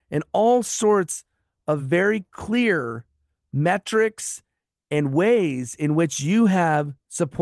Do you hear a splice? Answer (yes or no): no